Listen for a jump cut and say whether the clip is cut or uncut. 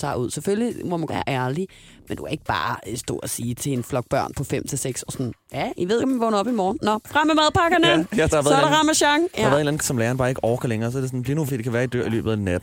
cut